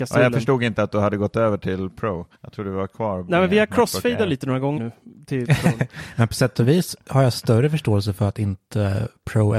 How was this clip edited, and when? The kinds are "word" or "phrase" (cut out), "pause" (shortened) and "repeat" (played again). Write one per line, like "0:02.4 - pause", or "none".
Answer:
0:02.3 - pause
0:04.8 - word